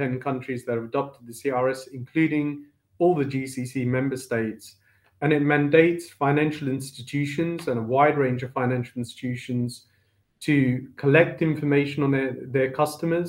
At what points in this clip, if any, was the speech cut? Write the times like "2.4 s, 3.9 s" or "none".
none